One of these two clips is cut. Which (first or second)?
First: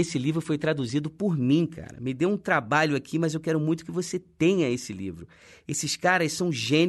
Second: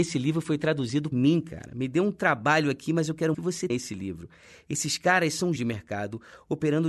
second